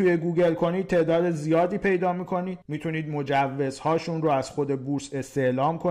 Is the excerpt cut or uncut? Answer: cut